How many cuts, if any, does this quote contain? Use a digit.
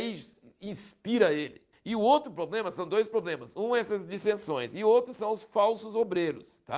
1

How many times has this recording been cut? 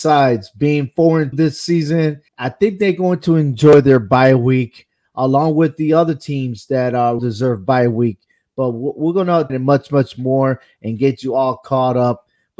4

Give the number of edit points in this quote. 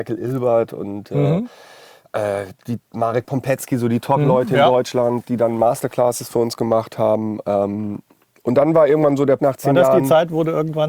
1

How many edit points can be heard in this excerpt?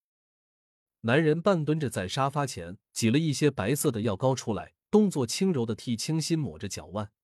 2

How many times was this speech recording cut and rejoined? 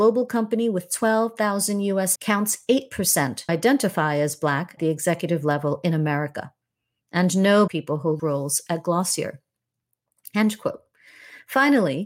5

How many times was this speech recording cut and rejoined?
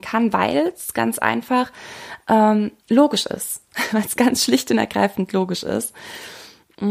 1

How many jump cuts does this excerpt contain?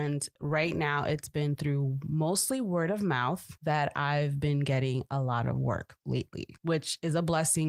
0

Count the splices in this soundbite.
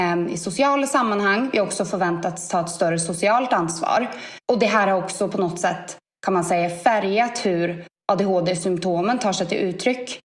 1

